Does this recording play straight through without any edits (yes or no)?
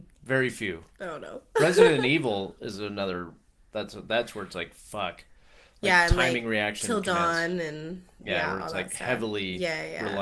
yes